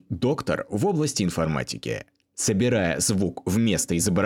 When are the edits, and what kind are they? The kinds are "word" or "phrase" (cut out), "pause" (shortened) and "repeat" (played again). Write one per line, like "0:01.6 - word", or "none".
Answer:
none